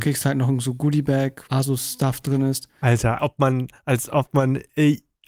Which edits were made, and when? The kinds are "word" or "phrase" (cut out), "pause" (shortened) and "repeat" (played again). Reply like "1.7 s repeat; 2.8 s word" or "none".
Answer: 1.5 s word; 3.2 s word